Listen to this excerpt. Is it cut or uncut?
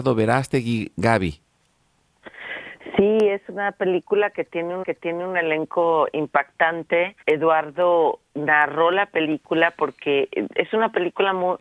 cut